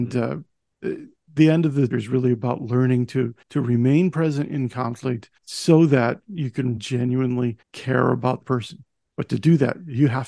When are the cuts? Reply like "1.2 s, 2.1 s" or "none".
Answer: 1.9 s, 3.4 s, 5.4 s, 6.8 s, 7.6 s, 8.4 s